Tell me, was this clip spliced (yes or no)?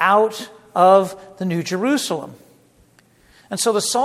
no